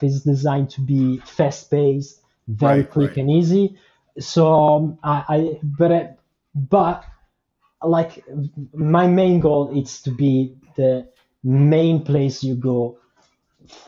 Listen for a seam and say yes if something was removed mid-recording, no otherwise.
no